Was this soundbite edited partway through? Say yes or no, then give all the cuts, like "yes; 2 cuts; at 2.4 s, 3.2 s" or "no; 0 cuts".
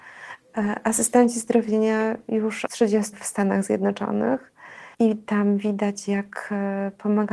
yes; 3 cuts; at 2.7 s, 3.1 s, 4.9 s